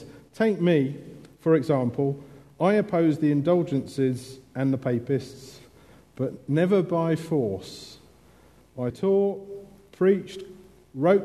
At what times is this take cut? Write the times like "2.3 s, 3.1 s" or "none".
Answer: 8.9 s